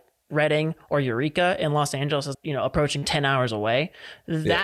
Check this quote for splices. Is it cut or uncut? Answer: cut